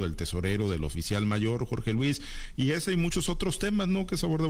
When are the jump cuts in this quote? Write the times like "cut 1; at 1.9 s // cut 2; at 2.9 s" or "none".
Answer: none